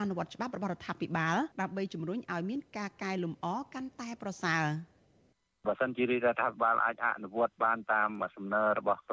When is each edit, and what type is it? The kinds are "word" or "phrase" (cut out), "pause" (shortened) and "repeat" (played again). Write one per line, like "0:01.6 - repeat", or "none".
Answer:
0:01.5 - pause